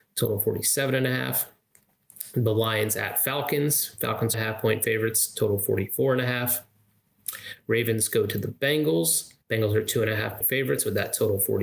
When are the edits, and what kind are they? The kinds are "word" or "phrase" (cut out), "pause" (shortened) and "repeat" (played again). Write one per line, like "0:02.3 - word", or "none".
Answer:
0:04.3 - phrase
0:09.4 - pause
0:10.4 - word

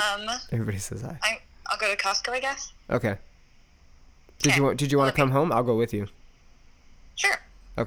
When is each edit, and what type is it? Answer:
none

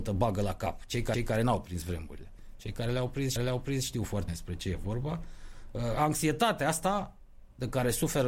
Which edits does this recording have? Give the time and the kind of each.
0:01.1 - repeat
0:03.4 - repeat
0:04.3 - word

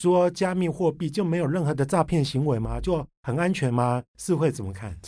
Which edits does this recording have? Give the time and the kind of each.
0:04.1 - pause

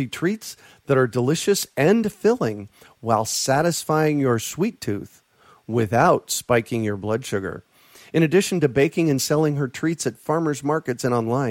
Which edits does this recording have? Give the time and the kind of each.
none

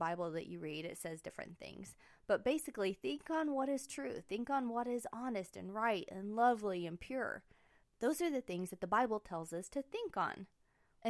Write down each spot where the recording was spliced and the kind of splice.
none

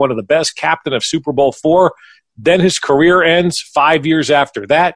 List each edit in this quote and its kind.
none

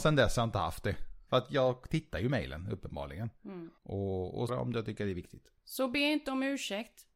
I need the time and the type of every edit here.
0:01.3 - pause
0:03.8 - pause
0:04.5 - word
0:05.6 - pause

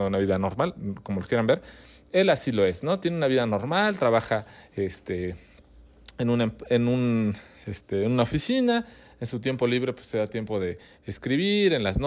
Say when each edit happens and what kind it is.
none

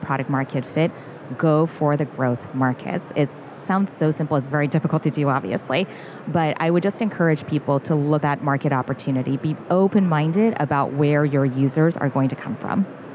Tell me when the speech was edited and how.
0:03.6 - phrase
0:04.5 - word
0:08.2 - word

